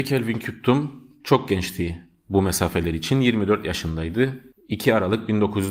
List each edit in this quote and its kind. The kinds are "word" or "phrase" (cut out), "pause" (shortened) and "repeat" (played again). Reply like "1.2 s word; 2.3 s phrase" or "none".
none